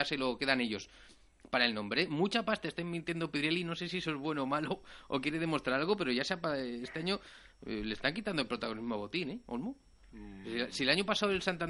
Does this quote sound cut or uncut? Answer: uncut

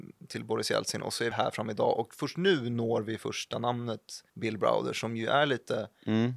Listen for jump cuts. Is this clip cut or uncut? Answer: cut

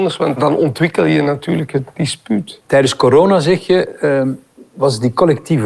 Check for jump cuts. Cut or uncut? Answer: cut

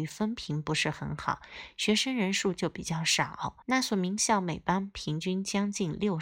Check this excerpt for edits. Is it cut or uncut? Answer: cut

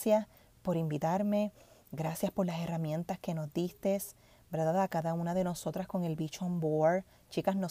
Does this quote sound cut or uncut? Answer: uncut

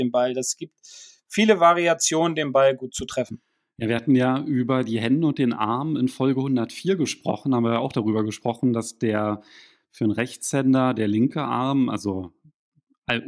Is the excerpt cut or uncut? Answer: uncut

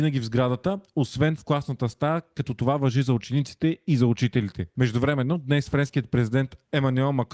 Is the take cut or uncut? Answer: uncut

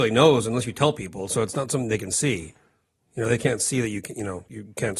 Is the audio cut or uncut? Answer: uncut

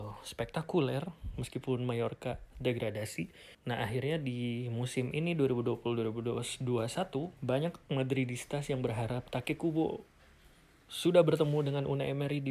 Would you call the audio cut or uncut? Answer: cut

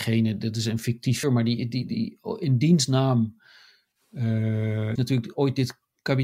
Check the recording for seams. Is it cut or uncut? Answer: cut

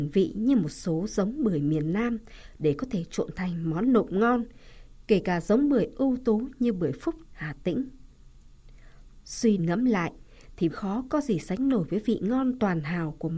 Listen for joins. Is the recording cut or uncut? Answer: cut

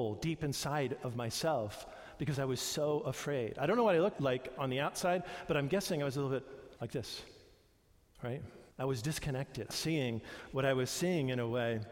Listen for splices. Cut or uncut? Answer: cut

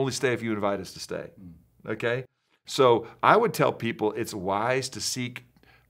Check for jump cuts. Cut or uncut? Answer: uncut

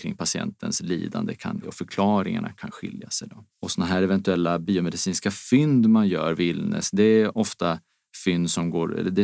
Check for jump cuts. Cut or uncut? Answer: cut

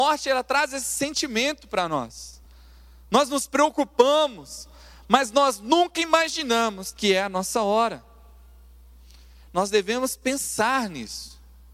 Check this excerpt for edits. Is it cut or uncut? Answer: uncut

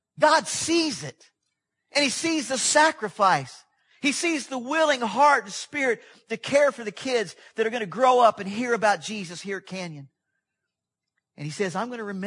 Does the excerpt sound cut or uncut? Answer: uncut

